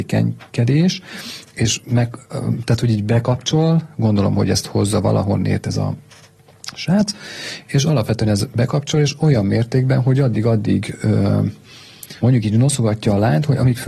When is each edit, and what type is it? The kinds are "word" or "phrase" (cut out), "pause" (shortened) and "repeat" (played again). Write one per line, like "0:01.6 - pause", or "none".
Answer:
0:12.2 - pause